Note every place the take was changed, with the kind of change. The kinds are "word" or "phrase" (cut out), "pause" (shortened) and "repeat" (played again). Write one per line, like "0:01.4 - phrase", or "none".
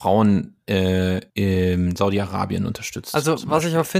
0:01.3 - pause